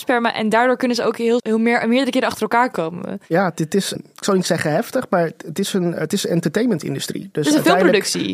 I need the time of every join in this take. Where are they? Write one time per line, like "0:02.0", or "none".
0:01.4
0:04.0

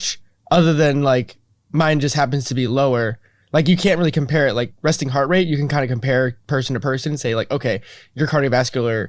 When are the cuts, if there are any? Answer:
none

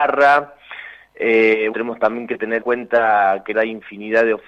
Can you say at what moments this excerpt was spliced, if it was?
0:01.7
0:02.6
0:03.5

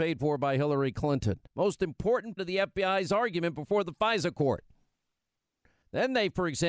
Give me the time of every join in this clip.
0:01.5
0:02.4

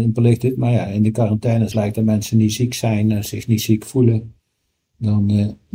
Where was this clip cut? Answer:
0:01.7

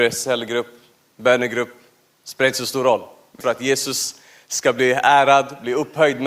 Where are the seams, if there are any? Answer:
0:03.4

